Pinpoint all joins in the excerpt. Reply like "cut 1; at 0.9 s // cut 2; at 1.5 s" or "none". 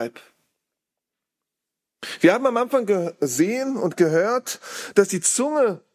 none